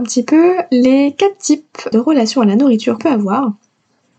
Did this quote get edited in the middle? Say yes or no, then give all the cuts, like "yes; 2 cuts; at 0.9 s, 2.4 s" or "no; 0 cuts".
yes; 2 cuts; at 1.9 s, 3.0 s